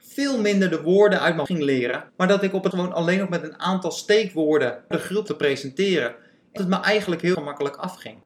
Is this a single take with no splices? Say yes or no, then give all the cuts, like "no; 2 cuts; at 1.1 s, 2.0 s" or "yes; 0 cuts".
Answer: no; 7 cuts; at 1.5 s, 2.1 s, 2.7 s, 4.9 s, 5.3 s, 6.6 s, 7.3 s